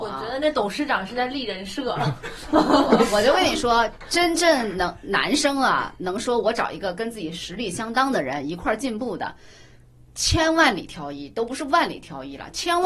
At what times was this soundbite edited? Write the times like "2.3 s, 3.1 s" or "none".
none